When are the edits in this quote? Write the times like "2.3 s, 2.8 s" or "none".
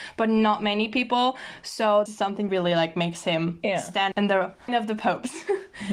2.1 s, 2.5 s, 4.1 s, 4.7 s